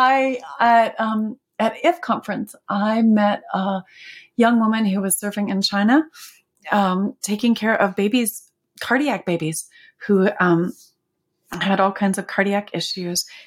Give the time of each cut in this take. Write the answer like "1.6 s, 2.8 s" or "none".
none